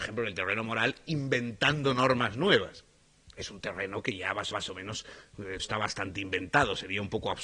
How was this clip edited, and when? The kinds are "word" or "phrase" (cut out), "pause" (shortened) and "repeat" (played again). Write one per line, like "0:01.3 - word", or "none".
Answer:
0:04.5 - repeat
0:05.6 - word